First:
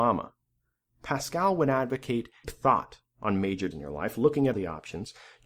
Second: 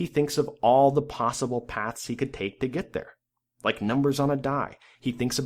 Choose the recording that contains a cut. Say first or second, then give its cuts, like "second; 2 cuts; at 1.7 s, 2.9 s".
first; 3 cuts; at 2.4 s, 3.7 s, 4.5 s